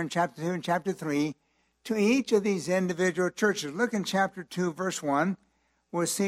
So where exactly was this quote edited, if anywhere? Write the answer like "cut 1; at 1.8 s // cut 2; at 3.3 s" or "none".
none